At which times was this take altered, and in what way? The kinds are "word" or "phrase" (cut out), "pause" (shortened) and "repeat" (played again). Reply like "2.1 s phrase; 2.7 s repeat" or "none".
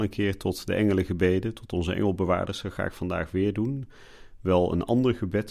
none